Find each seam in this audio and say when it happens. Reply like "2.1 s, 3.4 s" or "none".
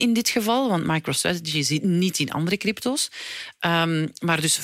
none